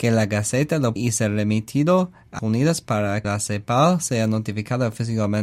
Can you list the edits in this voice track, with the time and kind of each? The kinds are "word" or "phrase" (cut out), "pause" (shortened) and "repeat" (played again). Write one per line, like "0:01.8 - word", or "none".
0:01.0 - word
0:02.4 - word
0:03.2 - word

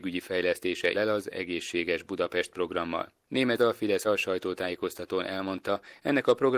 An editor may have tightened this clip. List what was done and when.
0:00.9 - word
0:03.6 - word
0:04.0 - word

